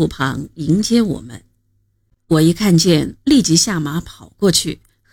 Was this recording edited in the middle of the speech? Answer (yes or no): no